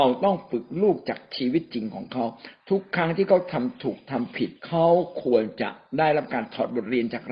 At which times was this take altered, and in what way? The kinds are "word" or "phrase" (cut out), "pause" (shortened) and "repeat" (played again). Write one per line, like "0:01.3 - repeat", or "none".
0:04.6 - pause